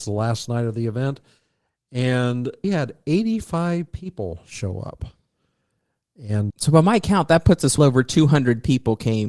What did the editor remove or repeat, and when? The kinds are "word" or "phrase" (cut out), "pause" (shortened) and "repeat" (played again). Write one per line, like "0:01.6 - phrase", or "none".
0:02.6 - word
0:06.5 - word
0:07.8 - word